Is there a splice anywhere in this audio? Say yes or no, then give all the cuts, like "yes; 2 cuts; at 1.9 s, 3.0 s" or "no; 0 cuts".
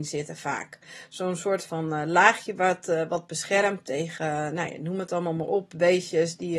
no; 0 cuts